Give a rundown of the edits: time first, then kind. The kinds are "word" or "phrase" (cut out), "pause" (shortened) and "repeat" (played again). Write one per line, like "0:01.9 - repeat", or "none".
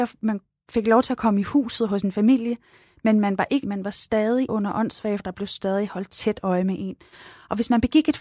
0:03.6 - word
0:04.5 - word
0:05.2 - word